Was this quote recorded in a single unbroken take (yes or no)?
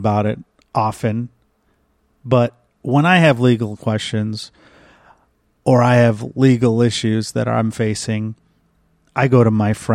no